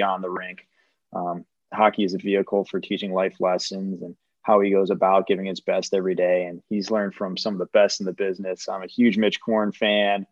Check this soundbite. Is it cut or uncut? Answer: uncut